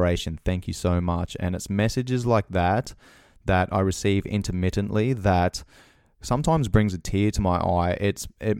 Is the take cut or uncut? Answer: uncut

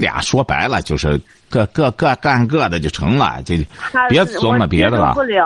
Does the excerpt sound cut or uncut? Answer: uncut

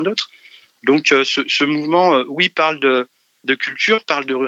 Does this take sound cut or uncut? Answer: uncut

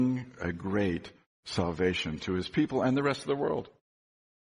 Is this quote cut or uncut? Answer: uncut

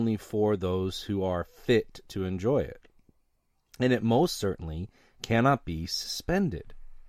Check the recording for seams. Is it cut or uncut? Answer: uncut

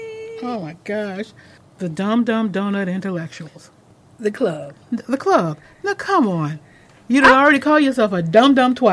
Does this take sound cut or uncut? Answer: uncut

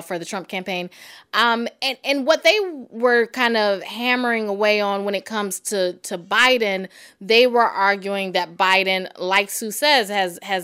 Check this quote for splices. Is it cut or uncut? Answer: uncut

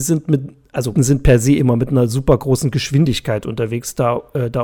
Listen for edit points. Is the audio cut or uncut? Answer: cut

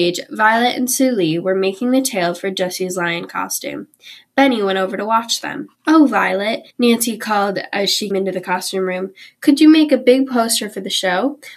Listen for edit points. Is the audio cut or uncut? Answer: cut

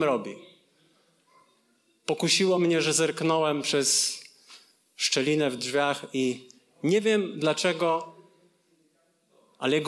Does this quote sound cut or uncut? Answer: uncut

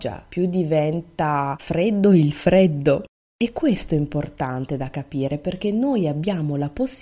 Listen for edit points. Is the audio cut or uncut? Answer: uncut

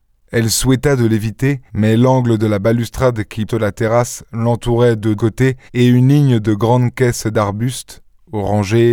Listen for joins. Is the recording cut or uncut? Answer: cut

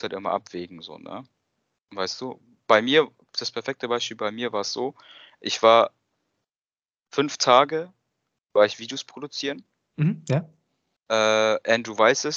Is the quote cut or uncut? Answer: uncut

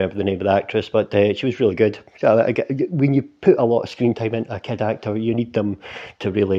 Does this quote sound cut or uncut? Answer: uncut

